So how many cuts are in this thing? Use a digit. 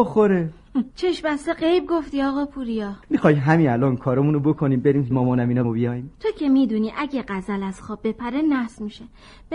5